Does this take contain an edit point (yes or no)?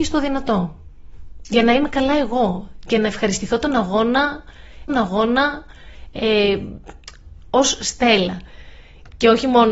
yes